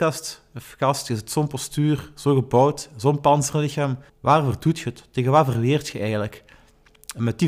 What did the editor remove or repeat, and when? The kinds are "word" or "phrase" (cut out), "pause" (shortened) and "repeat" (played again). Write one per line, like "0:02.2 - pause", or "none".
0:04.1 - pause